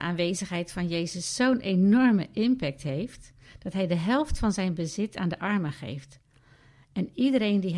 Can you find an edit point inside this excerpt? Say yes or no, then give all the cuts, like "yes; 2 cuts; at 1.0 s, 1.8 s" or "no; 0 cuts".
no; 0 cuts